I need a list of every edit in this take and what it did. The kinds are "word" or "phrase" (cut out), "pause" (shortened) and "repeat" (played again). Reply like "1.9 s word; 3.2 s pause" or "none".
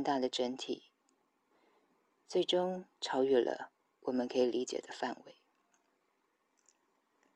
none